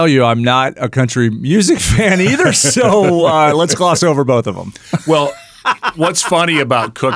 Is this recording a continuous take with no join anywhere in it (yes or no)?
yes